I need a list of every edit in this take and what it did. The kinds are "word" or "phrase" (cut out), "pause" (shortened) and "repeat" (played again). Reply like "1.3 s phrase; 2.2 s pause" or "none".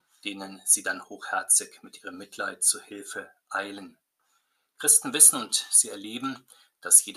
none